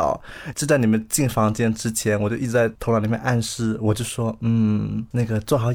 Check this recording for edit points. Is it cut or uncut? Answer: uncut